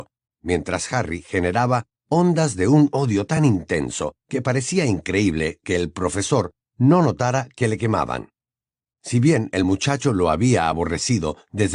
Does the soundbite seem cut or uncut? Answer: uncut